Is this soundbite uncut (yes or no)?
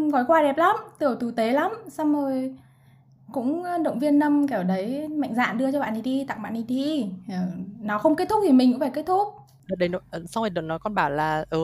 yes